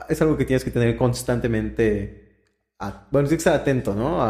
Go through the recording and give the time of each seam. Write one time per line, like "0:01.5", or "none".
none